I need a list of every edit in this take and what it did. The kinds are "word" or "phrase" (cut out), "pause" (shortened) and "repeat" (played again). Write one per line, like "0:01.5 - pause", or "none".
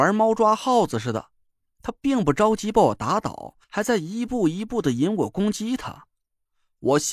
0:03.6 - pause